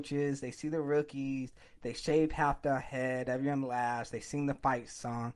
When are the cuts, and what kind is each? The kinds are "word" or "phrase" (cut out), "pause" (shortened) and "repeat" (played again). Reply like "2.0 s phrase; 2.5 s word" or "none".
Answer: none